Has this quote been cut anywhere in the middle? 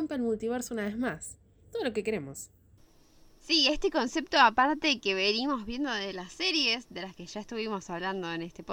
no; 0 cuts

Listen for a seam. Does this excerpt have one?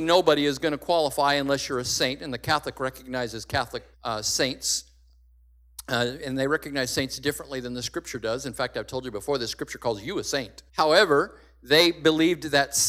yes; 2 cuts; at 3.9 s, 10.7 s

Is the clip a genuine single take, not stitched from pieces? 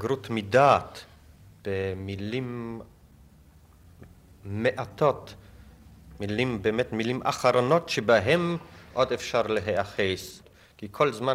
yes; 0 cuts

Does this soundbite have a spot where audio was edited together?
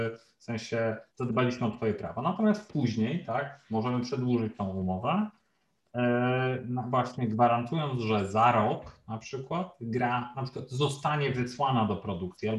yes; 1 cut; at 1.1 s

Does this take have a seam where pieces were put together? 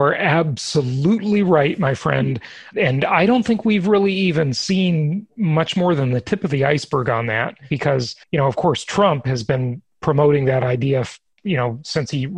yes; 1 cut; at 8.2 s

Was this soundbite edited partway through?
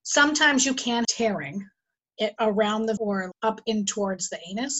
yes; 4 cuts; at 1.0 s, 2.0 s, 3.0 s, 3.3 s

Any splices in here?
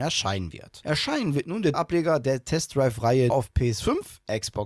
yes; 2 cuts; at 1.7 s, 3.3 s

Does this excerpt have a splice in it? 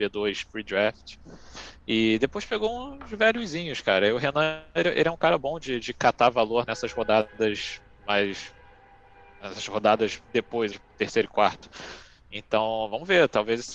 yes; 2 cuts; at 6.7 s, 10.7 s

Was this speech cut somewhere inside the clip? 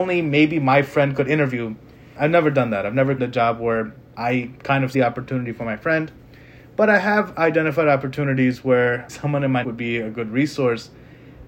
yes; 5 cuts; at 2.2 s, 3.2 s, 4.9 s, 9.1 s, 9.6 s

